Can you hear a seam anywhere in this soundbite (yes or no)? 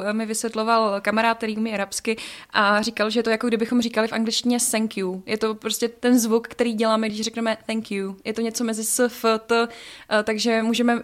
no